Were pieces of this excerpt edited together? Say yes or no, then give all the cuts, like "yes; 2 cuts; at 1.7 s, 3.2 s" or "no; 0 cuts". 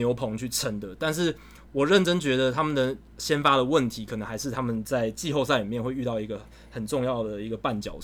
no; 0 cuts